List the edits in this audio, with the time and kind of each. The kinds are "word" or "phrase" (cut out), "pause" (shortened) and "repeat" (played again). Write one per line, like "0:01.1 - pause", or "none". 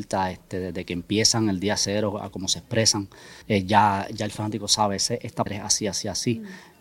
0:03.4 - pause
0:05.5 - word